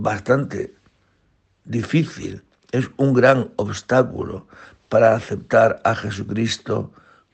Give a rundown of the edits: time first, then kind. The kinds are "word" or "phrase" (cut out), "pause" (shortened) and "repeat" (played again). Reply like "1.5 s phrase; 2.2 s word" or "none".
none